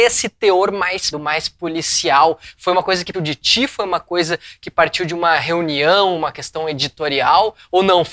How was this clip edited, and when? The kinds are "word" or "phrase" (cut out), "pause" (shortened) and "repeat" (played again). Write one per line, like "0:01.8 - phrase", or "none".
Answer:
0:01.1 - word
0:03.1 - word